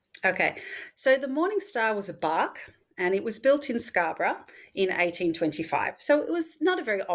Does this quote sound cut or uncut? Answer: uncut